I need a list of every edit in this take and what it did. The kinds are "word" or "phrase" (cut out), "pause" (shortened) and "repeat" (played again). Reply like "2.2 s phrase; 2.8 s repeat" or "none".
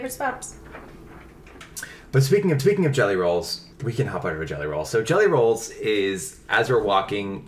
2.6 s repeat; 3.7 s pause